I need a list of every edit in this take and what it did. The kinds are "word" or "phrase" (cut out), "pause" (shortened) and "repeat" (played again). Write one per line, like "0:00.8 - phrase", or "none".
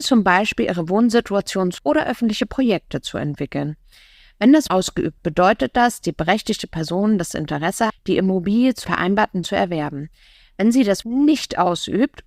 0:01.8 - word
0:04.7 - word
0:05.2 - word
0:06.0 - word
0:07.9 - word
0:08.8 - word
0:09.4 - word
0:11.0 - word